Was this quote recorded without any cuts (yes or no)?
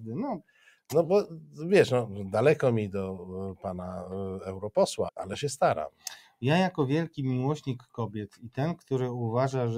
no